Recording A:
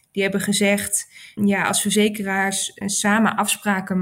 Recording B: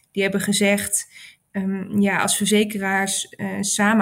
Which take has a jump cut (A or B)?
A